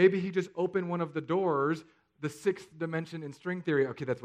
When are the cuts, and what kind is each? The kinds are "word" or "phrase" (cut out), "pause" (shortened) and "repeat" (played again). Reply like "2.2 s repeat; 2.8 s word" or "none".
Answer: none